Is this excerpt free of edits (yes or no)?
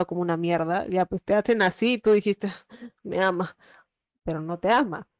yes